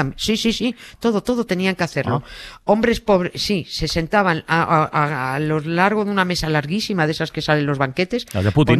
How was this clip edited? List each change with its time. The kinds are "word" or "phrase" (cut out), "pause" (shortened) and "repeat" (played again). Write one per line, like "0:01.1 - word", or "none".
none